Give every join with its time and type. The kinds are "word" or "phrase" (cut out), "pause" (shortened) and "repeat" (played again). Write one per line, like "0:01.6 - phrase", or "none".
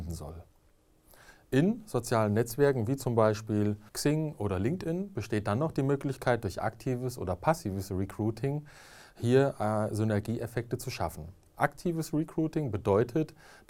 0:03.9 - pause